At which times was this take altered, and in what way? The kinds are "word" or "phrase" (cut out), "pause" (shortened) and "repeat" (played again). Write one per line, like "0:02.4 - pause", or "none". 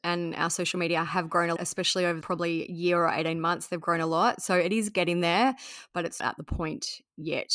0:01.6 - word
0:02.2 - phrase
0:06.2 - word